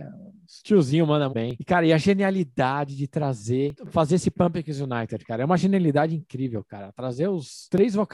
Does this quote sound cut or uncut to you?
cut